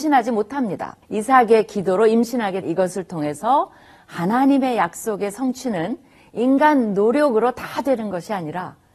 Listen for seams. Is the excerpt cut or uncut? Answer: cut